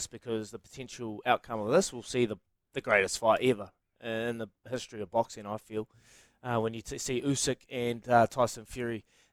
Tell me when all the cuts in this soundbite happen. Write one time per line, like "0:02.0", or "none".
none